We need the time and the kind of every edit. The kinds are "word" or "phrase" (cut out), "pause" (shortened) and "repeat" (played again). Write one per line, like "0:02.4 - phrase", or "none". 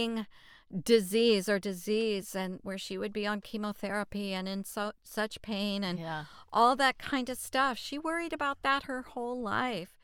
0:01.6 - word
0:02.6 - word